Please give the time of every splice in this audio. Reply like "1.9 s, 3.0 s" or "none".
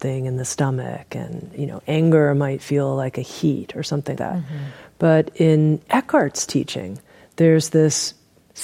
4.2 s